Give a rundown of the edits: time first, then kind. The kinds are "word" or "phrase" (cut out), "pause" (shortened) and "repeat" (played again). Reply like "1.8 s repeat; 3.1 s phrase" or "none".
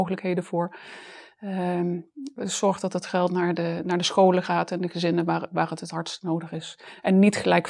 none